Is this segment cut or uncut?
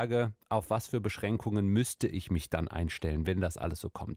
uncut